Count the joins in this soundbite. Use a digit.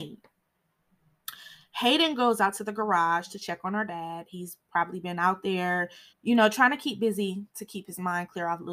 1